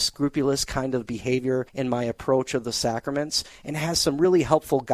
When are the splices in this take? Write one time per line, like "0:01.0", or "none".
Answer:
0:01.7